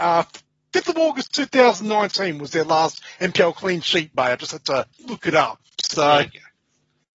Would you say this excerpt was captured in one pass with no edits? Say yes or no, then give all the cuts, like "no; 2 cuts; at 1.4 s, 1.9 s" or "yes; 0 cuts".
no; 2 cuts; at 4.1 s, 4.9 s